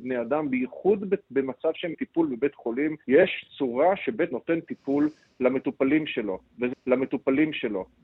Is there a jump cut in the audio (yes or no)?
yes